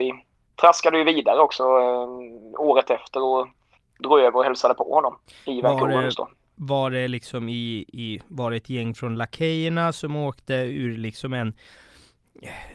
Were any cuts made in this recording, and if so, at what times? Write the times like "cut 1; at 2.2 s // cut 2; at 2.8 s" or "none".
none